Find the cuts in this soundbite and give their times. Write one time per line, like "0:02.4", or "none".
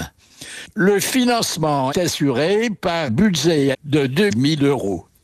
0:01.9
0:03.1
0:03.7
0:04.3